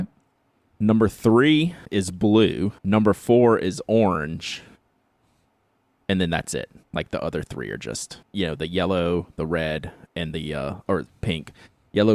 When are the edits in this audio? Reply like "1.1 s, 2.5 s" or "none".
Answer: 1.9 s, 2.8 s, 8.2 s